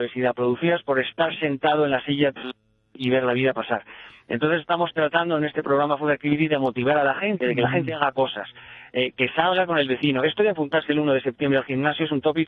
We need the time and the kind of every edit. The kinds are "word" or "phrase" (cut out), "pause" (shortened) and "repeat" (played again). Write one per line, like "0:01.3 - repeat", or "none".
0:09.1 - word